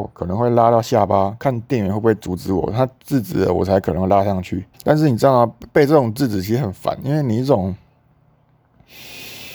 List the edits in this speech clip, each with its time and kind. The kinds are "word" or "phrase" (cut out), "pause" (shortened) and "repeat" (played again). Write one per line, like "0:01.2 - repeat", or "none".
0:04.7 - pause

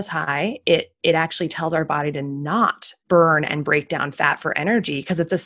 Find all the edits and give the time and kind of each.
0:03.0 - pause

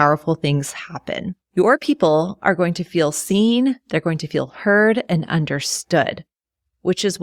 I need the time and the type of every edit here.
0:01.4 - pause

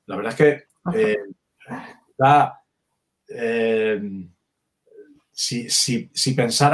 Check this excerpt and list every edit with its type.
none

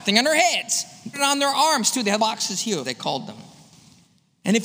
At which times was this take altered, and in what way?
0:01.1 - word
0:02.2 - word
0:02.8 - word

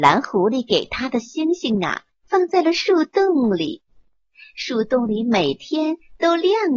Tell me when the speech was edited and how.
none

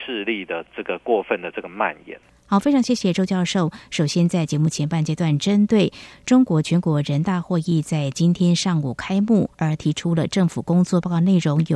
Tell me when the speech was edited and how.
0:09.5 - pause

